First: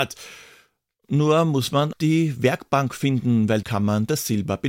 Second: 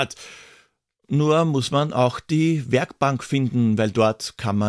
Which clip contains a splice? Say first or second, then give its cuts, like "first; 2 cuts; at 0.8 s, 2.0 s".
first; 2 cuts; at 1.9 s, 3.6 s